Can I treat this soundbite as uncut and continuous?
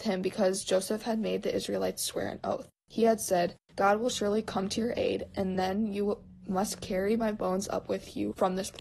yes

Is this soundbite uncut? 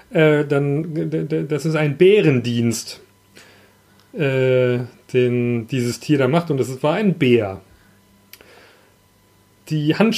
yes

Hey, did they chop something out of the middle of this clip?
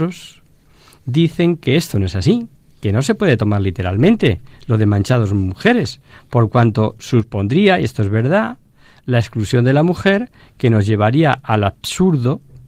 no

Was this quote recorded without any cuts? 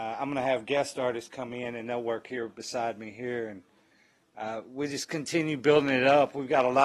yes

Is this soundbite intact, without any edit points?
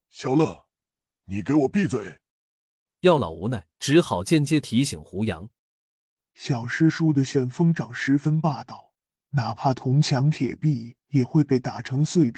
no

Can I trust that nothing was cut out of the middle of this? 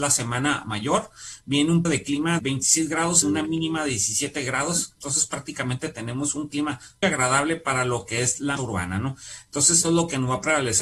no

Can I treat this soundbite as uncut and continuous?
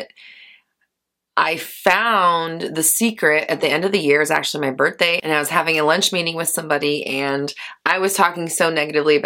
yes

